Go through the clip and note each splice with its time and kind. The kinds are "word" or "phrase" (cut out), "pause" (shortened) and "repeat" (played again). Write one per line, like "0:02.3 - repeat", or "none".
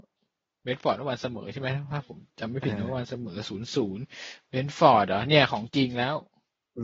0:02.3 - pause